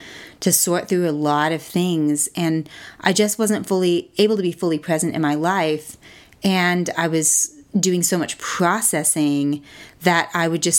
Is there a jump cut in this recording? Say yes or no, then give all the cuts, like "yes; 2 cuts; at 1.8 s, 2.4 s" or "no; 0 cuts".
no; 0 cuts